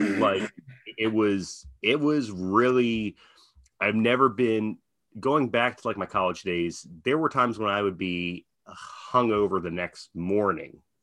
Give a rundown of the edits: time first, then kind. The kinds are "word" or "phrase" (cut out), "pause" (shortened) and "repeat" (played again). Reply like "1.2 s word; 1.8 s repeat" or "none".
none

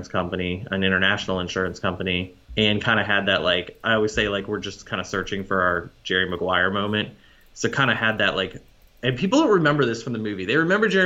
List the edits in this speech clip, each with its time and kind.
2.4 s pause

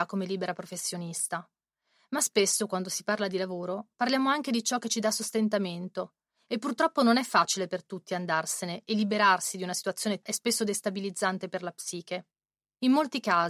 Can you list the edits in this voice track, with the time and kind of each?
10.2 s word

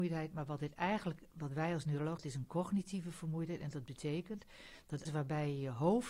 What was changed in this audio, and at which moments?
2.2 s word; 5.1 s word

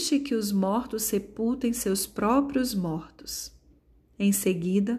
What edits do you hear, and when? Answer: none

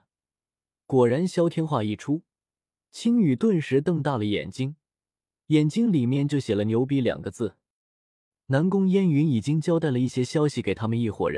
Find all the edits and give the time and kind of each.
none

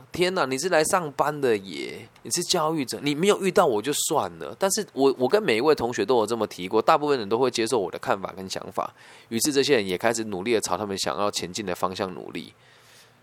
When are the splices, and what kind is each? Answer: 2.2 s pause

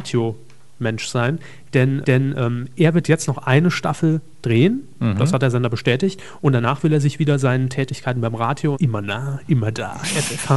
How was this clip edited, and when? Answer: 2.0 s repeat; 8.7 s phrase

